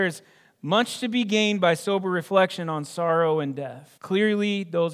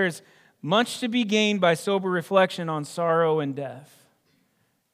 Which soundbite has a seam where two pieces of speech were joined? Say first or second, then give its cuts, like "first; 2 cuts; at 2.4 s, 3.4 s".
first; 1 cut; at 4.0 s